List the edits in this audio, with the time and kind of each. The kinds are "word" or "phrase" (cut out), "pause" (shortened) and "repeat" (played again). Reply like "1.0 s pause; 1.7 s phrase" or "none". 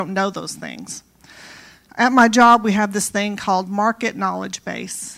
none